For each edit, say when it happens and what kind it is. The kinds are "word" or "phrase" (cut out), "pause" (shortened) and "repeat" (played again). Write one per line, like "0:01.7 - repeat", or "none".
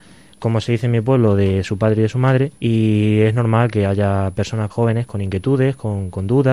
0:02.6 - pause
0:04.7 - word